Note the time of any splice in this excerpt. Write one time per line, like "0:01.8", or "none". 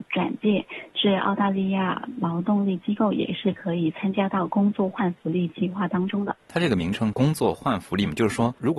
0:06.4